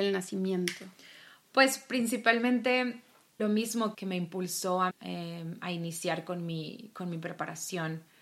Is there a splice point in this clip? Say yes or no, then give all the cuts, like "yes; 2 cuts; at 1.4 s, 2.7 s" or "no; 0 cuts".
yes; 3 cuts; at 3.4 s, 3.9 s, 4.9 s